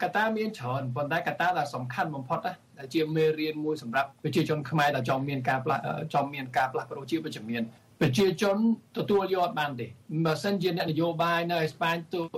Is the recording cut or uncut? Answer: cut